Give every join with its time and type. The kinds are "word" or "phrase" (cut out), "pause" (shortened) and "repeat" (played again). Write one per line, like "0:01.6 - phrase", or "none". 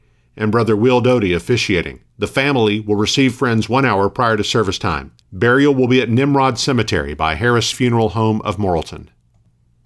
0:02.1 - pause
0:05.2 - pause